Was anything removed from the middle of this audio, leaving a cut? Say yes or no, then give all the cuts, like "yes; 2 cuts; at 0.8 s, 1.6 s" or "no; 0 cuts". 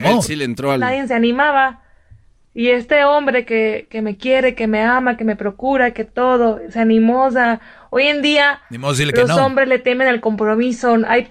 no; 0 cuts